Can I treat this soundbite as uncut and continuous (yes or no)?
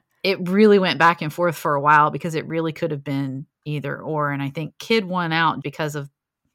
no